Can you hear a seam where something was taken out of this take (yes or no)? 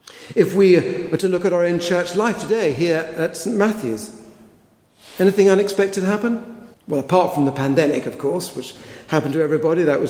yes